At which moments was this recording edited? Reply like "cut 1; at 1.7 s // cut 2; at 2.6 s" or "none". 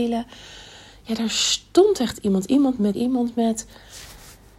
cut 1; at 2.9 s